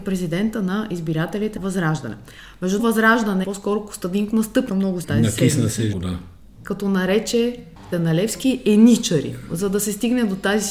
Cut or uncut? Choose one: cut